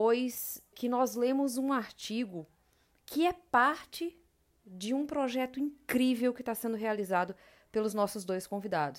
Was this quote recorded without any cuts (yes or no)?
yes